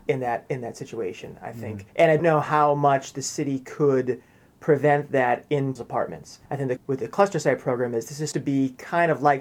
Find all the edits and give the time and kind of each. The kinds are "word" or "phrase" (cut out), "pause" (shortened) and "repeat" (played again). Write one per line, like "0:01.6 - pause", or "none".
0:01.9 - pause
0:02.2 - word
0:05.8 - word
0:06.5 - pause
0:06.8 - phrase
0:08.3 - word